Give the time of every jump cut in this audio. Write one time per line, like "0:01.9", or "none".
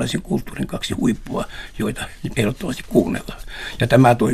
0:02.3